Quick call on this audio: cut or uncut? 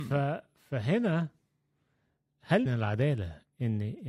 cut